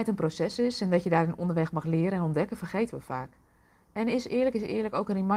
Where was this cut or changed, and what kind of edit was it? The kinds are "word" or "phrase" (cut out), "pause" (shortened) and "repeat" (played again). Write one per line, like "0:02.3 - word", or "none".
none